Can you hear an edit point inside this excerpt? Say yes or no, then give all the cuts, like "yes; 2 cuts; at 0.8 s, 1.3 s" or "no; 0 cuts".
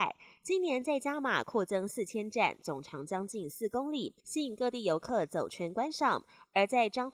yes; 1 cut; at 4.2 s